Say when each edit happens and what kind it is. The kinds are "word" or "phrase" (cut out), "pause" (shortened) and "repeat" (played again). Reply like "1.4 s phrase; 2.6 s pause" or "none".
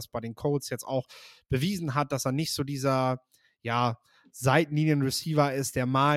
none